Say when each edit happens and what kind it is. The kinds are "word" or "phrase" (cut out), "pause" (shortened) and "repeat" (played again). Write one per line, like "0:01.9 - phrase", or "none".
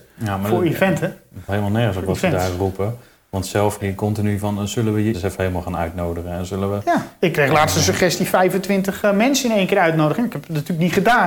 0:01.5 - word
0:03.8 - word
0:05.1 - word